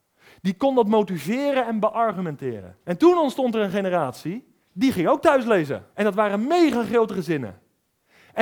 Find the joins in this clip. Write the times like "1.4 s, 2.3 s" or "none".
2.8 s, 4.6 s, 5.9 s